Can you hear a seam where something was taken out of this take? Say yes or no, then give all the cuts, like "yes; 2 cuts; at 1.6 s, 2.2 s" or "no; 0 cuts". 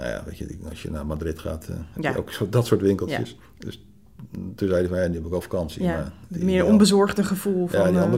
yes; 1 cut; at 3.5 s